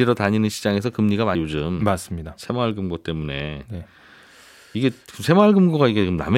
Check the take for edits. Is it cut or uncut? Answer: cut